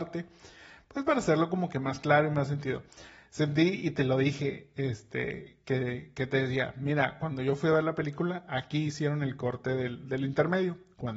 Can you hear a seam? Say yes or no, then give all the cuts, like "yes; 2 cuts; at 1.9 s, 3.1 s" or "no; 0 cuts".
no; 0 cuts